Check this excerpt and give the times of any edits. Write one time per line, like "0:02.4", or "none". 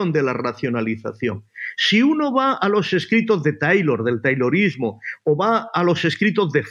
none